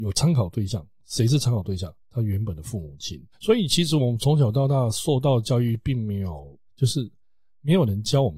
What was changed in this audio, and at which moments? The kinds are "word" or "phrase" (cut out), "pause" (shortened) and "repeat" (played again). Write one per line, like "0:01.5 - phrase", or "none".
0:02.0 - pause
0:03.3 - pause
0:06.7 - pause